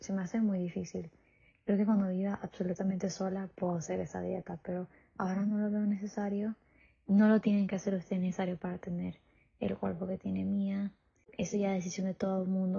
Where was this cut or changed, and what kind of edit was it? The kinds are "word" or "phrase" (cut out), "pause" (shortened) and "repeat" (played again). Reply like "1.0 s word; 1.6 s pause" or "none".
none